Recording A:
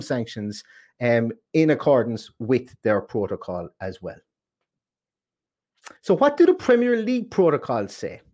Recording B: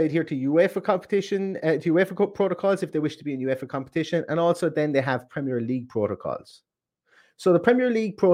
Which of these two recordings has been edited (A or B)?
A